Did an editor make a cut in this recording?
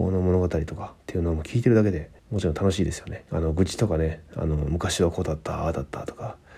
yes; 3 cuts; at 1.0 s, 2.2 s, 3.3 s

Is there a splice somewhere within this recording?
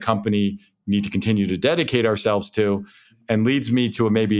no; 0 cuts

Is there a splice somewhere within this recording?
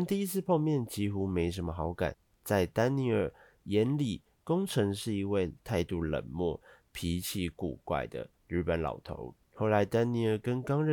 no; 0 cuts

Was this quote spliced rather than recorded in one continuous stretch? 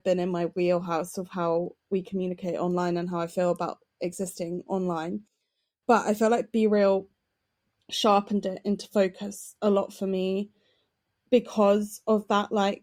no; 0 cuts

